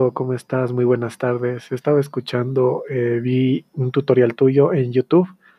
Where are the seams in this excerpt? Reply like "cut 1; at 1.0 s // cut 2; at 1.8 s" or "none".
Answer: none